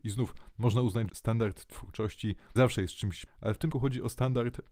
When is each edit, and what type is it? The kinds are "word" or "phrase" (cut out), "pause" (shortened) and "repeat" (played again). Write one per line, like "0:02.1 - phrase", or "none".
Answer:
0:01.1 - word
0:02.6 - word
0:03.3 - word
0:03.7 - word